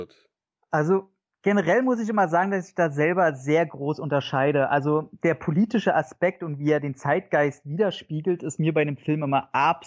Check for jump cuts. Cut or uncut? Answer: uncut